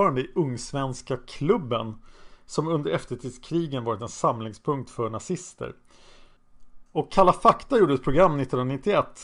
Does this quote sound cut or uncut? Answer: cut